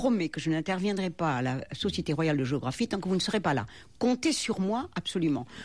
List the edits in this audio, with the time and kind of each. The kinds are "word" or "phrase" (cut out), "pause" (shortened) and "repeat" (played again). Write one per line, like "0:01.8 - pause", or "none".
none